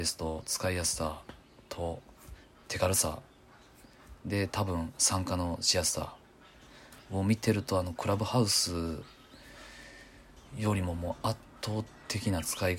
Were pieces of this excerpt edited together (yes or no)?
no